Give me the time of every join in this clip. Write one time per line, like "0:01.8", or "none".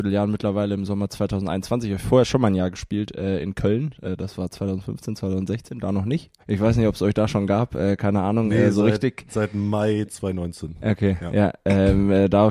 0:06.4